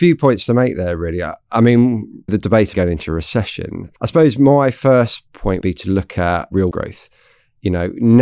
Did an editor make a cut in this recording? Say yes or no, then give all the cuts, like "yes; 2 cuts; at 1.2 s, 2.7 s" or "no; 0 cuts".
yes; 5 cuts; at 2.3 s, 2.7 s, 4.0 s, 5.6 s, 6.7 s